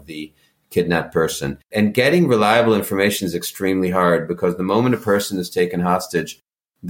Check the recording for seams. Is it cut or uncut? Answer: cut